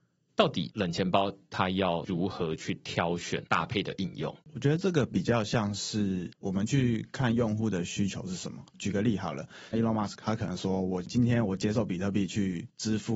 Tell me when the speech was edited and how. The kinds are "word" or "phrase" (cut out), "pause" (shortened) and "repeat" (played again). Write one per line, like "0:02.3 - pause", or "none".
0:04.4 - pause
0:08.7 - pause
0:09.7 - phrase

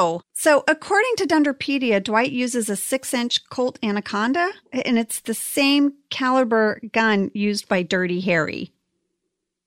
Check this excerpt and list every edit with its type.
none

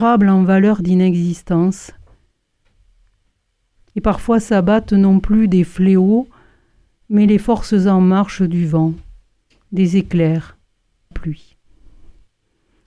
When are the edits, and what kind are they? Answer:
0:11.1 - phrase

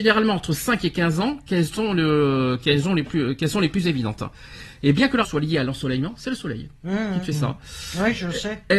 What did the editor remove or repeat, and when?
0:05.2 - word

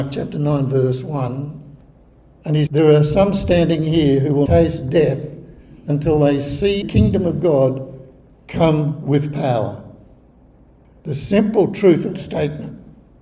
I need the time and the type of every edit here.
0:02.7 - word
0:04.5 - word
0:06.8 - word
0:12.1 - word

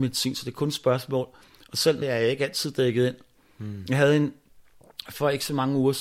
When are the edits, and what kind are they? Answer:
0:02.0 - phrase

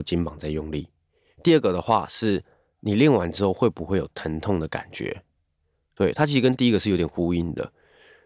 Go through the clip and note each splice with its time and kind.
none

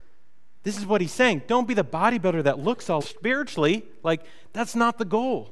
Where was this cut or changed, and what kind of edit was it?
0:03.0 - word

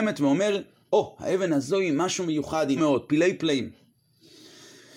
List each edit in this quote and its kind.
0:02.8 - word

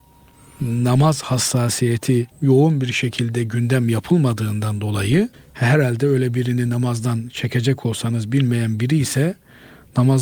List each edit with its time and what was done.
0:02.3 - pause
0:05.3 - pause

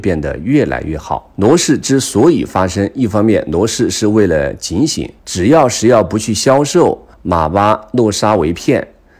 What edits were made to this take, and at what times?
0:05.2 - pause
0:07.1 - pause

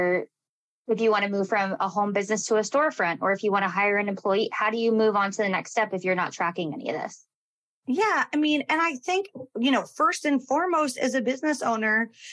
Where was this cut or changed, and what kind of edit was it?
none

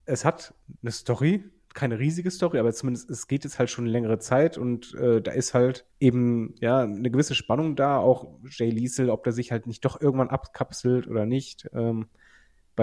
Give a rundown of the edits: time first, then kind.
0:05.9 - pause

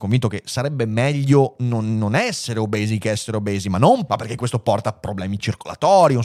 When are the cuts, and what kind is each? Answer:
0:04.1 - word

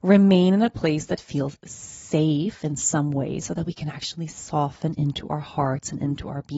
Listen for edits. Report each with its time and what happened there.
none

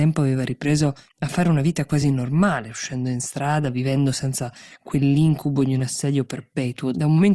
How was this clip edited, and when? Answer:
none

